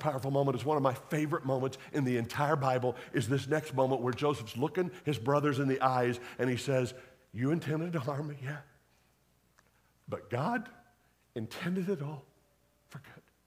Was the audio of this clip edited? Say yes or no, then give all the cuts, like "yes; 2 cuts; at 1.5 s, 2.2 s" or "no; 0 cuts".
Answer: no; 0 cuts